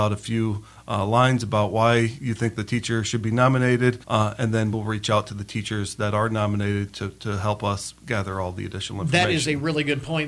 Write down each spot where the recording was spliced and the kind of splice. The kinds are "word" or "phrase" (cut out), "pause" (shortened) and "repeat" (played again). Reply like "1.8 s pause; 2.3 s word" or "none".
4.0 s pause; 4.7 s word